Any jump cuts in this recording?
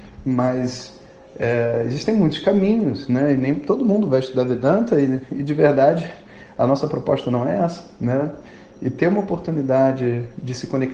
no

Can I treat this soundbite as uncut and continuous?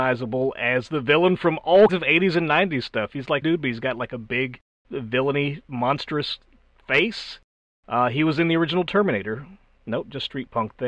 no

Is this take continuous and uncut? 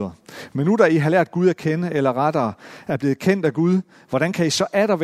yes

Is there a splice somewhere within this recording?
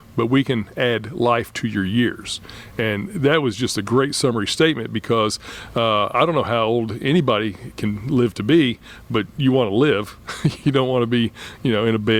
no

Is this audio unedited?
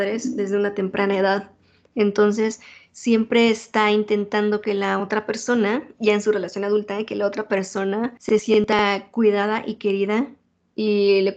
yes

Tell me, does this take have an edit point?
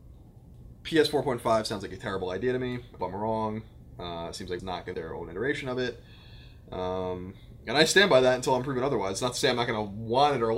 yes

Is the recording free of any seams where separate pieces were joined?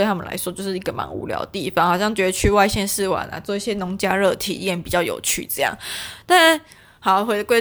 yes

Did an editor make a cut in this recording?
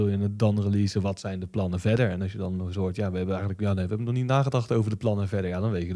no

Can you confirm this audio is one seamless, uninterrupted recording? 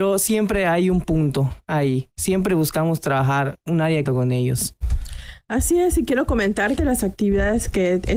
no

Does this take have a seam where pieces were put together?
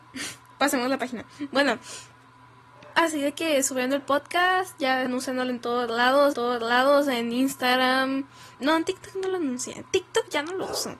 yes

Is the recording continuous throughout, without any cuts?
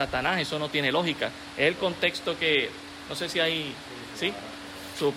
yes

